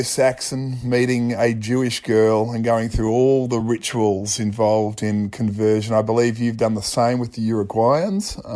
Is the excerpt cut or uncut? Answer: uncut